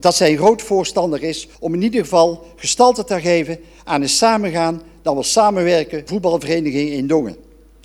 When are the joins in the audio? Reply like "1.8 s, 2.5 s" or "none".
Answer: 1.6 s, 6.1 s